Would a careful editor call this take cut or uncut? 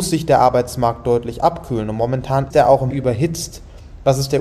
cut